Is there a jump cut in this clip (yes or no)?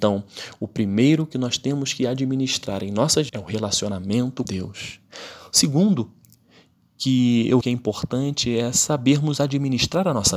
yes